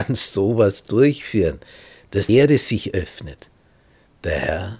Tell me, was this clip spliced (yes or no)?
yes